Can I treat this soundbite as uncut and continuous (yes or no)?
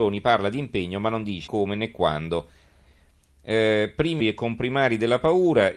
no